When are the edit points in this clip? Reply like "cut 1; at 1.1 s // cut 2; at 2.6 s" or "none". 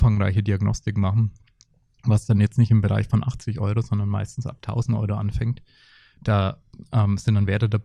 none